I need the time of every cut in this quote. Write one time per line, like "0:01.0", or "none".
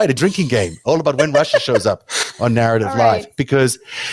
none